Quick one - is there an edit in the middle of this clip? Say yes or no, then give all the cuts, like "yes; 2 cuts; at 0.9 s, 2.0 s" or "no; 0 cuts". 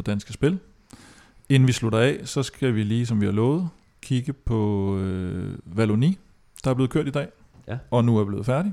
no; 0 cuts